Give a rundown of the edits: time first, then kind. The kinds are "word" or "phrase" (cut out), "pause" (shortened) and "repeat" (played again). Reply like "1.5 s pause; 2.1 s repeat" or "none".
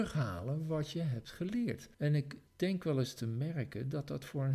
1.9 s pause; 2.5 s pause